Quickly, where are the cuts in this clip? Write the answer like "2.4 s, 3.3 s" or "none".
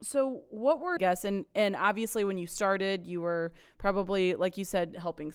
1.0 s